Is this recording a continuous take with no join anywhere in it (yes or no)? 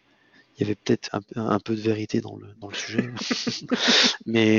no